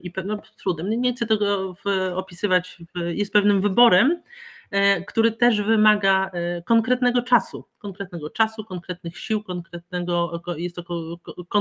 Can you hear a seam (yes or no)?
no